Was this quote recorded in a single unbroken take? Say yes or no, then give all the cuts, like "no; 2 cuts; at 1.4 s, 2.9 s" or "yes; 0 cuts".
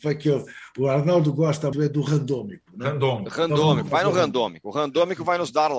no; 1 cut; at 1.7 s